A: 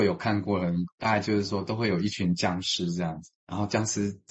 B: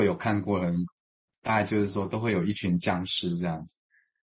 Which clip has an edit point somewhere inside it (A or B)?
A